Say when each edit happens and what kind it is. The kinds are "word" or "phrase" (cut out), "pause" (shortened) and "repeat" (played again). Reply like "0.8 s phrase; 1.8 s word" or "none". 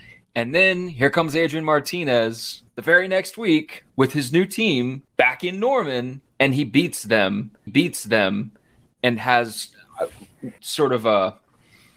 2.7 s pause; 3.9 s pause; 5.1 s pause; 6.3 s pause; 7.7 s repeat; 10.6 s word